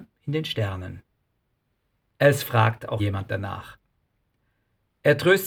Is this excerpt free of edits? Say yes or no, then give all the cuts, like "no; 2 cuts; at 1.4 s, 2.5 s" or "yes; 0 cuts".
no; 1 cut; at 3.0 s